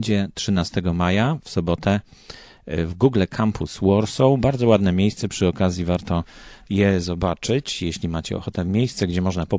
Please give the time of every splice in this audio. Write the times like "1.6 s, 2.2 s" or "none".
none